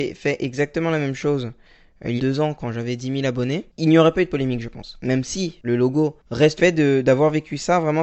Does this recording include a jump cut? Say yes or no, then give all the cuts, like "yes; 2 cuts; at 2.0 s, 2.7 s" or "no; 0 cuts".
yes; 3 cuts; at 2.2 s, 5.6 s, 6.6 s